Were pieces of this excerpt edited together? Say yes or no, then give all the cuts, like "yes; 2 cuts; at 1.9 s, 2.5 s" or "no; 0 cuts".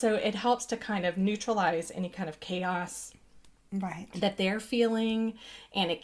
no; 0 cuts